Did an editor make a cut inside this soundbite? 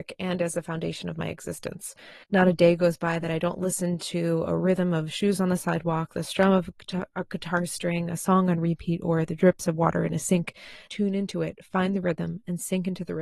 yes; 2 cuts; at 2.2 s, 10.9 s

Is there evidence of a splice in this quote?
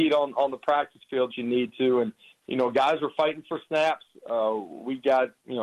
yes; 1 cut; at 1.3 s

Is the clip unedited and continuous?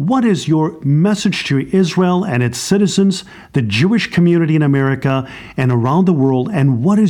yes; 0 cuts

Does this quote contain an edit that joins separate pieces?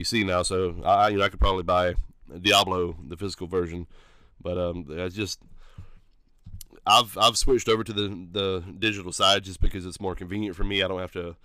no; 0 cuts

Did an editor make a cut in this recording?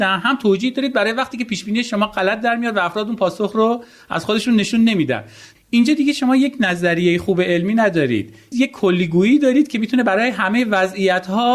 no; 0 cuts

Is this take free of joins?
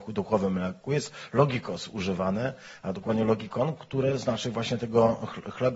yes; 0 cuts

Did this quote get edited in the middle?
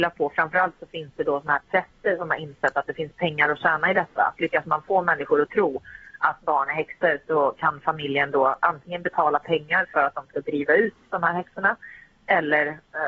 no; 0 cuts

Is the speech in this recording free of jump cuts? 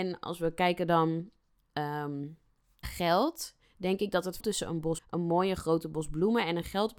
no; 3 cuts; at 2.8 s, 4.4 s, 5.0 s

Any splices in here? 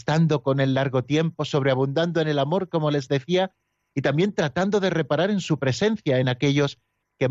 no; 0 cuts

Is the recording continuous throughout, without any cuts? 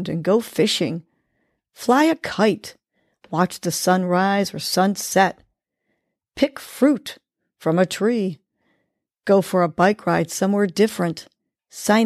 yes; 0 cuts

